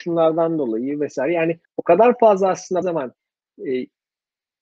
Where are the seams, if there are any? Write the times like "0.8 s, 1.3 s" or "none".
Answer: 1.7 s, 2.8 s